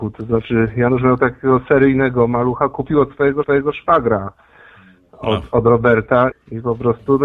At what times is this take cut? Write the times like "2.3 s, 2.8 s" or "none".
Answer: 3.4 s, 6.3 s